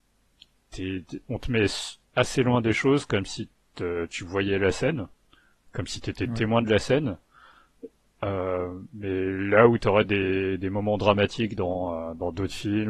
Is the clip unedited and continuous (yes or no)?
yes